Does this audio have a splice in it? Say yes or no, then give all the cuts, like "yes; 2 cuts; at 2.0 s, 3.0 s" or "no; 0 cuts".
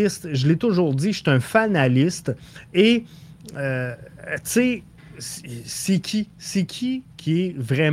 no; 0 cuts